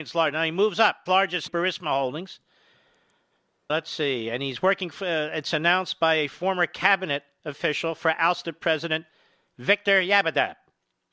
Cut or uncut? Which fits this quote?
cut